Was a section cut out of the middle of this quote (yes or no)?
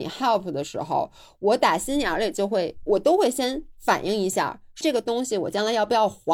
yes